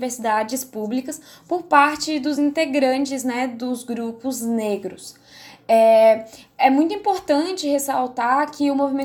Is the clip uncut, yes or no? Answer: yes